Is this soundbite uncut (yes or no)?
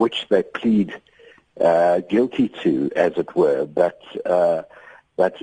yes